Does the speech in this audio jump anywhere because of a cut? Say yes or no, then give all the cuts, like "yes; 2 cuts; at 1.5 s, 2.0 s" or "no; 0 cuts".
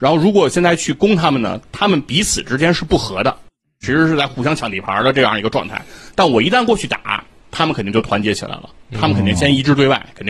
no; 0 cuts